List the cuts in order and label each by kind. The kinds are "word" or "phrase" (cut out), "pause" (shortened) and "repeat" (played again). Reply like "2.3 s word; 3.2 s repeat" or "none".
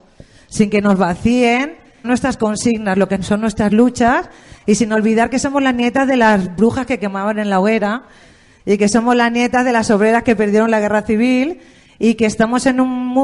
2.0 s phrase